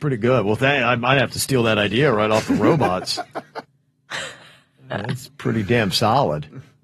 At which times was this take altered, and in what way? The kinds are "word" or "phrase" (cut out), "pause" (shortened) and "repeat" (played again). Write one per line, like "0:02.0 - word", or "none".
0:03.6 - pause